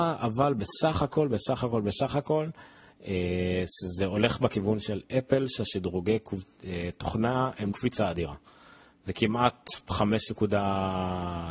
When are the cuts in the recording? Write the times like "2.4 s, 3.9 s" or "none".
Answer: 7.7 s